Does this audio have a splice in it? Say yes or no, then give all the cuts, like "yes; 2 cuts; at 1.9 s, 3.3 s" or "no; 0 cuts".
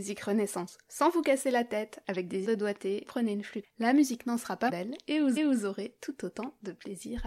yes; 5 cuts; at 2.4 s, 3.0 s, 3.6 s, 4.7 s, 5.4 s